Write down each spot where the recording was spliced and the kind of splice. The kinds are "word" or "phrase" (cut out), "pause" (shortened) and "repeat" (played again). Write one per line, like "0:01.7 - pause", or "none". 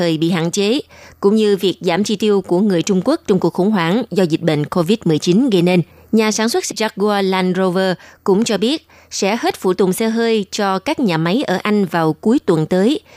0:05.9 - pause
0:06.7 - word